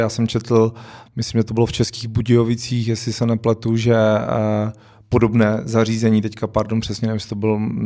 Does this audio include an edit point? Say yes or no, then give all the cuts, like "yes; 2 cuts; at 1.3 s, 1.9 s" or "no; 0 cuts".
no; 0 cuts